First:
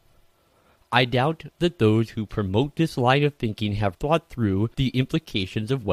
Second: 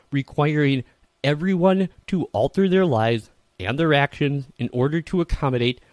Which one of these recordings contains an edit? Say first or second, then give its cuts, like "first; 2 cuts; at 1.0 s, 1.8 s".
first; 2 cuts; at 3.9 s, 4.7 s